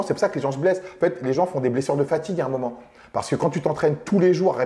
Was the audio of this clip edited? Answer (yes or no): no